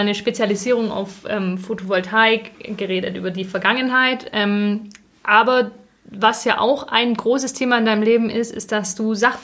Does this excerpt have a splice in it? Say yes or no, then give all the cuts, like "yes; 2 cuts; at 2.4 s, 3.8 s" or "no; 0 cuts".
no; 0 cuts